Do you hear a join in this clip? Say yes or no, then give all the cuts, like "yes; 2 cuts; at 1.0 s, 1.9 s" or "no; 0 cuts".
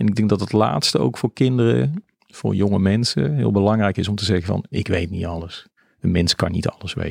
no; 0 cuts